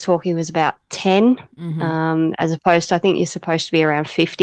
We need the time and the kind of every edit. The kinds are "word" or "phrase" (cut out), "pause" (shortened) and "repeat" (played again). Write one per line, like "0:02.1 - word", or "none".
none